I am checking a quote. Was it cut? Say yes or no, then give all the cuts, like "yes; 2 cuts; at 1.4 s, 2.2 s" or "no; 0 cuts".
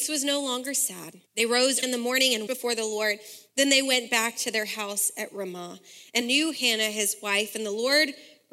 yes; 4 cuts; at 1.3 s, 1.8 s, 2.5 s, 6.2 s